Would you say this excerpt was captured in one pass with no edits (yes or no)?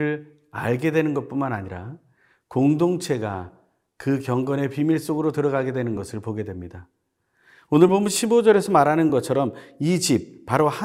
yes